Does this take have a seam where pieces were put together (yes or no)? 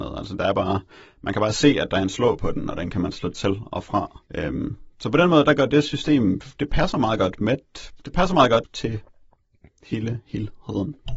yes